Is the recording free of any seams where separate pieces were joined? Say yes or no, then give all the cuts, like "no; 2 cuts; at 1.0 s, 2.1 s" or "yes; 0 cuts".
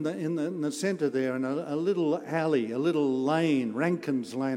yes; 0 cuts